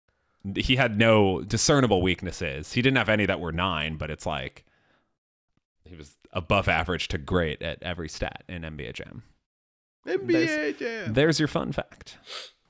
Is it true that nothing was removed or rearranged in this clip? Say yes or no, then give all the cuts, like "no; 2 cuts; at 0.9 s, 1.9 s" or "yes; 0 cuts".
yes; 0 cuts